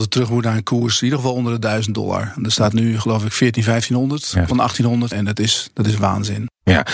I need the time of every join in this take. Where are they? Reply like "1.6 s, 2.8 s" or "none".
4.5 s, 5.1 s